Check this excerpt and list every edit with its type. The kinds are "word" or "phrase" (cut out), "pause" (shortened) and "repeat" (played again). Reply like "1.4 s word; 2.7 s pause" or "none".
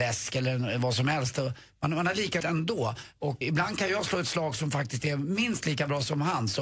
2.4 s word; 3.4 s word